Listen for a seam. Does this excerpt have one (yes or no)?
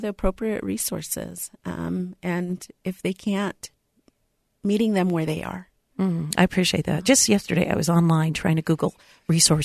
no